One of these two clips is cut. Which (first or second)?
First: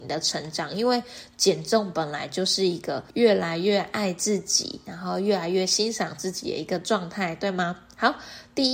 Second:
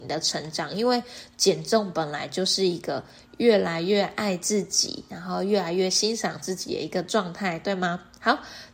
first